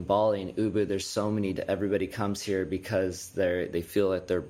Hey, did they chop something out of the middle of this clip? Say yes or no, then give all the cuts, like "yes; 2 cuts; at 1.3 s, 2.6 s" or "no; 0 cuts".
yes; 1 cut; at 1.6 s